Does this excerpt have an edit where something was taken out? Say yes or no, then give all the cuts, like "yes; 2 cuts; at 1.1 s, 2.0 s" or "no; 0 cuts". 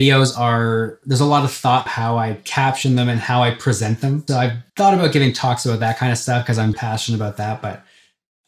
yes; 4 cuts; at 1.9 s, 4.3 s, 4.7 s, 6.7 s